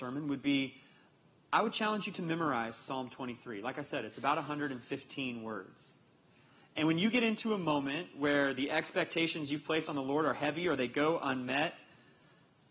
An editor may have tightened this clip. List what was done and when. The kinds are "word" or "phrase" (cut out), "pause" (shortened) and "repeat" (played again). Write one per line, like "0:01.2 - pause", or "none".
none